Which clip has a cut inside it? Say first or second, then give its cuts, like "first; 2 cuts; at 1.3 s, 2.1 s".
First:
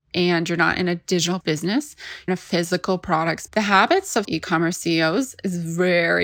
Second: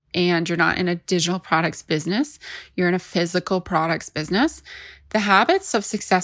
first; 4 cuts; at 1.4 s, 2.3 s, 3.5 s, 4.2 s